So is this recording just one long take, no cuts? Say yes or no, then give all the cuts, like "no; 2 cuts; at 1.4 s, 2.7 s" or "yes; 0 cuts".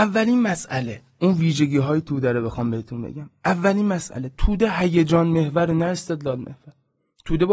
yes; 0 cuts